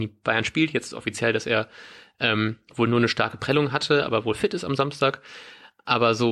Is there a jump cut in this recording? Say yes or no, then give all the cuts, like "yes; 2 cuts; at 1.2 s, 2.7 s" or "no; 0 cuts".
no; 0 cuts